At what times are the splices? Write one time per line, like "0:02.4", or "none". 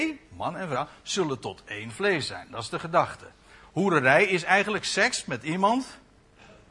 none